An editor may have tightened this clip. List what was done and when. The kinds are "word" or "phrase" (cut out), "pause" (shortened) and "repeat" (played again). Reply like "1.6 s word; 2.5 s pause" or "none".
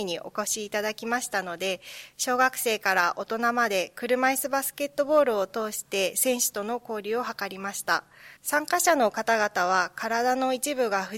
8.4 s pause